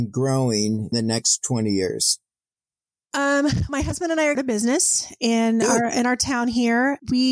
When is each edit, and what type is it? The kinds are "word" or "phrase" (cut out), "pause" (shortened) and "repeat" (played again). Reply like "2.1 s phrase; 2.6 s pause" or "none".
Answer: 0.9 s word; 3.7 s word; 4.3 s phrase